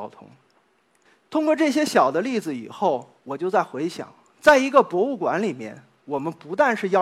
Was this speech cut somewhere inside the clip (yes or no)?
no